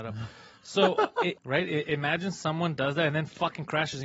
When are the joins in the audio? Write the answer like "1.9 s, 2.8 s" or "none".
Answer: 1.4 s